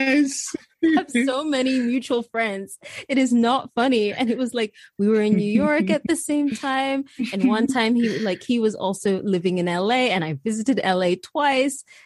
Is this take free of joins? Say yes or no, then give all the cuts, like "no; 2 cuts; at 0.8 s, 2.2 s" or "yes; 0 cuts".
yes; 0 cuts